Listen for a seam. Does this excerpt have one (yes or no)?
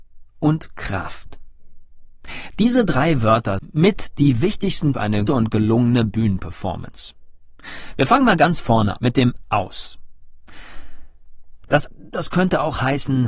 yes